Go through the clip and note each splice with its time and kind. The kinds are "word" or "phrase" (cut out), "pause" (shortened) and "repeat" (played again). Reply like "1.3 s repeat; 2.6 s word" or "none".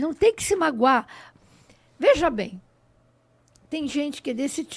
none